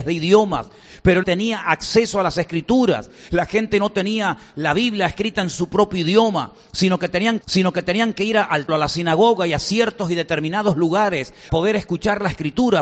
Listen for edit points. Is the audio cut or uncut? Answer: cut